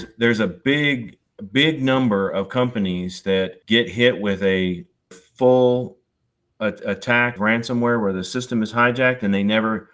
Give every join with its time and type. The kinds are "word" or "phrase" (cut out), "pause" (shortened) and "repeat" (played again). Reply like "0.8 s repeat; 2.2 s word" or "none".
3.6 s pause; 5.1 s word; 7.4 s word